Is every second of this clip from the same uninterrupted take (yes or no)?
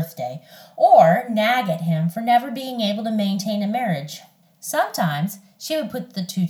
no